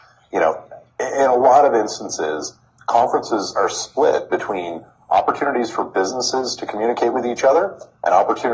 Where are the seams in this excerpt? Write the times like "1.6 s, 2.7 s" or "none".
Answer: none